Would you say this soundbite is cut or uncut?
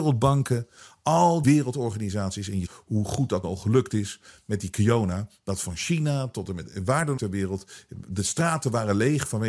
cut